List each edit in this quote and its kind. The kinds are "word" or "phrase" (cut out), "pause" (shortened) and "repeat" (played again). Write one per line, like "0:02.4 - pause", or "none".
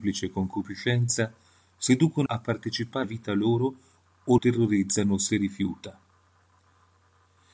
0:02.3 - word
0:03.0 - word
0:04.4 - word